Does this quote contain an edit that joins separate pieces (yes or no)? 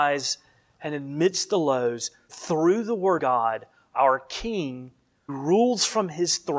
yes